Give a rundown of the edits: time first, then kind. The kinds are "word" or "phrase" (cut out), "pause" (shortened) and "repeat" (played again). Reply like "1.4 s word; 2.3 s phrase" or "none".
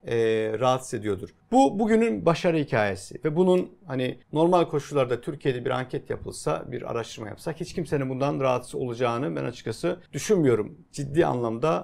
1.4 s pause; 4.2 s pause; 10.1 s pause